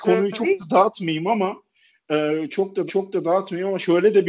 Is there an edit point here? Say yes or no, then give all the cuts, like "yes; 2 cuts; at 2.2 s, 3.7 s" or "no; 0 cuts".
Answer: yes; 1 cut; at 2.9 s